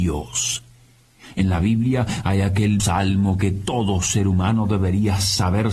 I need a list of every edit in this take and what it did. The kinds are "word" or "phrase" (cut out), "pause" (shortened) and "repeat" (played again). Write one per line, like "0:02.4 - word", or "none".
0:02.8 - word